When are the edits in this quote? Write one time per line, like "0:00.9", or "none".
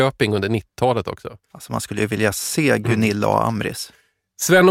0:01.4